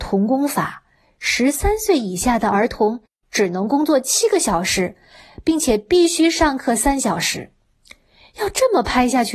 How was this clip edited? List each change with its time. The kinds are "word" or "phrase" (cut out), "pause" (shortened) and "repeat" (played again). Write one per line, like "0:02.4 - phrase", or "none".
none